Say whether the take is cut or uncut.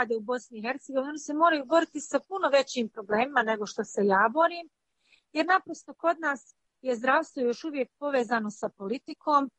uncut